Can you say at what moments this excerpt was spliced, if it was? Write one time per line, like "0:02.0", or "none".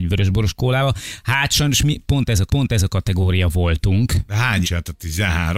0:02.5
0:04.6